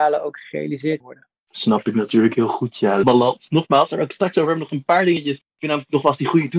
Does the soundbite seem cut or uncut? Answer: cut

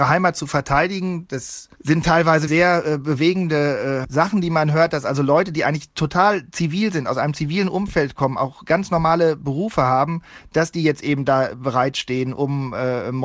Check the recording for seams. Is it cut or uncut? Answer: cut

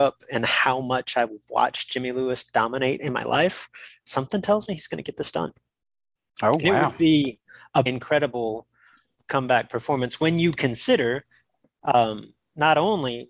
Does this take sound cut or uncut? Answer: cut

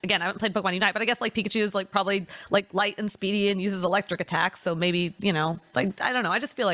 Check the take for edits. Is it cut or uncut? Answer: uncut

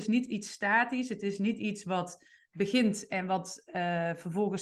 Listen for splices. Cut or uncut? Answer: uncut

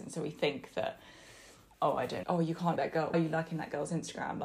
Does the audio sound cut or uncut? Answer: cut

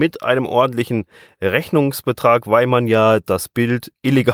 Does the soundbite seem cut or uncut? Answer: uncut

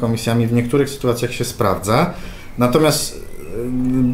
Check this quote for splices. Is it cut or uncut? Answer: uncut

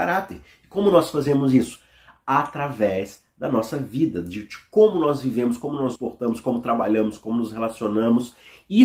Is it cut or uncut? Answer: cut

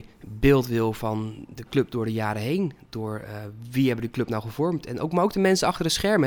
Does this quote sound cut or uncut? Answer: uncut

